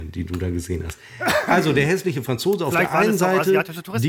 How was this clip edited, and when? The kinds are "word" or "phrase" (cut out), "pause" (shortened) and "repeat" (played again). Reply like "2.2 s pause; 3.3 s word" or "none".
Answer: none